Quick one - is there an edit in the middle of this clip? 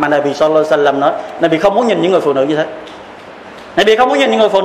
no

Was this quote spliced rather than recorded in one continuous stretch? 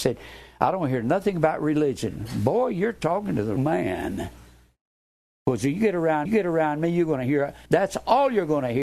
yes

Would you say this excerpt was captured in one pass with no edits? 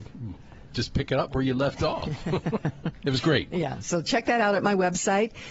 yes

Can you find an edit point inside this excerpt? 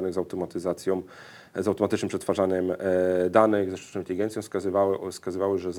no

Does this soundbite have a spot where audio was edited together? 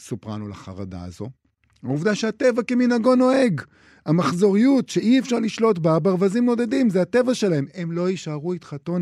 no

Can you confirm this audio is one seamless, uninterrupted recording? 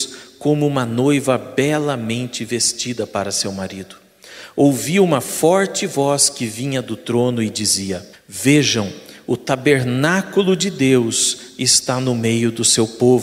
no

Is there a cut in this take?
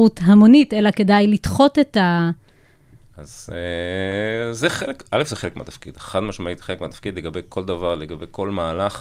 no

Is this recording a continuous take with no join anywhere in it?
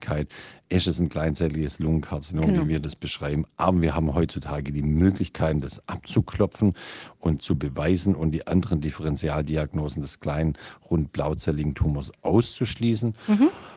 yes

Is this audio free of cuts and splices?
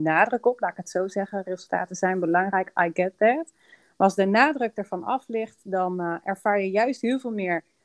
yes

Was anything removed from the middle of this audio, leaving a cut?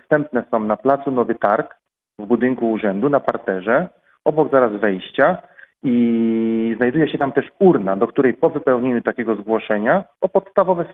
no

